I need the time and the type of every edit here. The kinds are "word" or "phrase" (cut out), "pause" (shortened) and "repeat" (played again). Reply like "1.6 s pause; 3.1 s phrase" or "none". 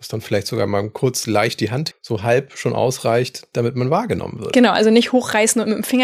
1.9 s word

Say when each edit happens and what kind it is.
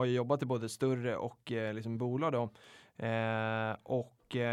1.9 s word

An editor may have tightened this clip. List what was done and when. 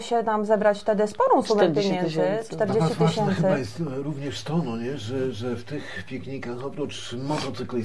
none

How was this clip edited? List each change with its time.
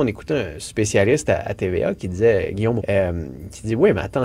2.8 s word

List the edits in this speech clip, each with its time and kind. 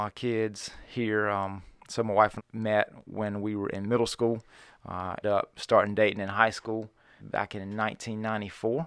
2.4 s word; 5.2 s word; 7.2 s word

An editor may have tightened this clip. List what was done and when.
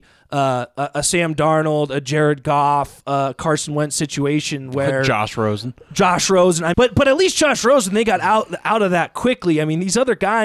6.7 s word

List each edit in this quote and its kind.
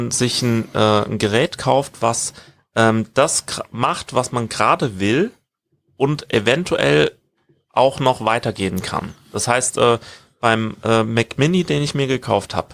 none

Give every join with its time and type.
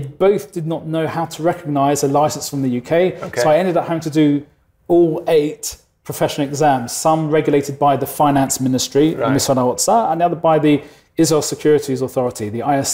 none

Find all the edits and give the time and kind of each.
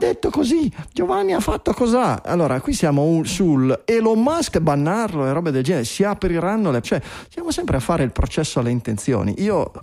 4.5 s phrase; 6.8 s phrase

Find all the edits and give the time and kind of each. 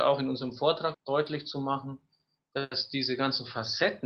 0.9 s word

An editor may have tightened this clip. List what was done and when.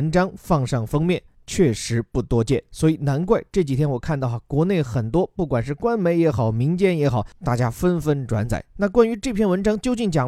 none

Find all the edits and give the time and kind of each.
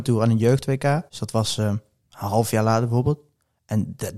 1.1 s pause

